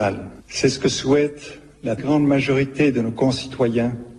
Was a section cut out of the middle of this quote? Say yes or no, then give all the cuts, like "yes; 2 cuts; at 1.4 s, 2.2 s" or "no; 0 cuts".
yes; 1 cut; at 2.0 s